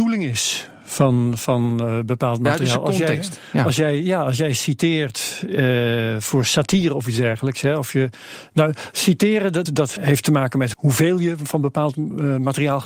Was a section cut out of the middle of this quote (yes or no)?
yes